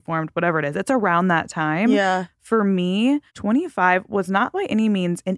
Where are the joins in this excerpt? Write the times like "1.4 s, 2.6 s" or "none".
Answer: 3.3 s